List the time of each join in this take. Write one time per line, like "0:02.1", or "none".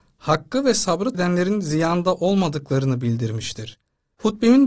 0:01.1